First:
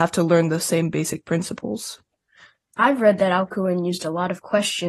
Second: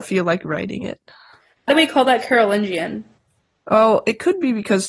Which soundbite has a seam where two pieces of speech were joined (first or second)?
second